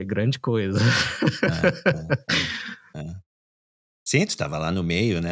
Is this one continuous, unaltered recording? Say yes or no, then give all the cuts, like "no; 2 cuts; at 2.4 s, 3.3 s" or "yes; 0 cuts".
yes; 0 cuts